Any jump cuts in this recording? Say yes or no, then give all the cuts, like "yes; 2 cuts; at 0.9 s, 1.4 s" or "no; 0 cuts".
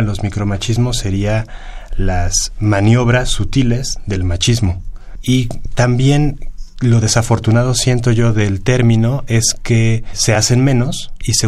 no; 0 cuts